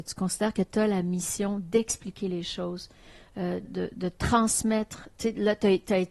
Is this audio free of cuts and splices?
yes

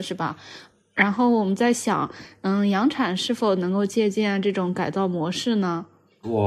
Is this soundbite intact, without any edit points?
yes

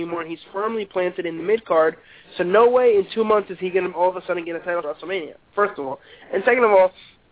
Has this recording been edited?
yes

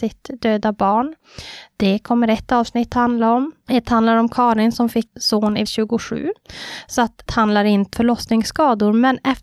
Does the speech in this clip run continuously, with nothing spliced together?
no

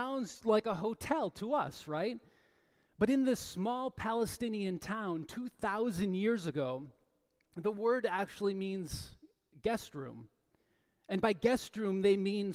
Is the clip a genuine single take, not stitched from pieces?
yes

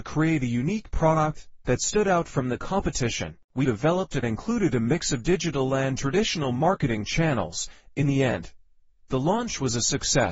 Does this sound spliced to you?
yes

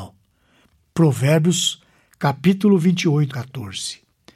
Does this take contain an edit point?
yes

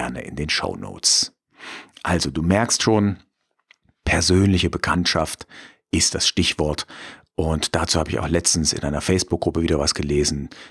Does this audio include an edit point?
no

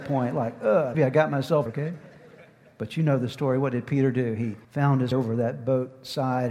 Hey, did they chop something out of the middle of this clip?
yes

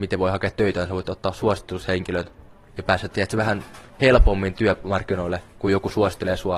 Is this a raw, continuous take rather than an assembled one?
yes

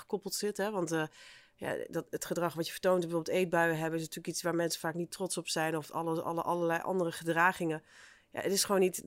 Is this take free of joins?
yes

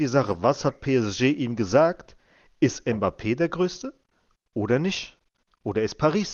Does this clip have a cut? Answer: no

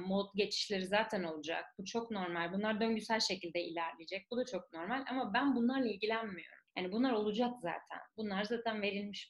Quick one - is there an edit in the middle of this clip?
yes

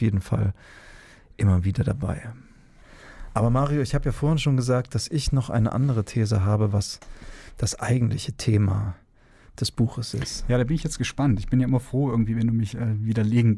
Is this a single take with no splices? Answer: yes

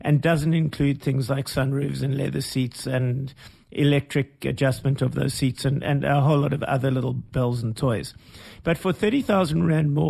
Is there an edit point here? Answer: no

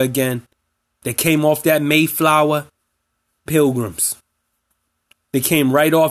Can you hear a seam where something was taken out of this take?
yes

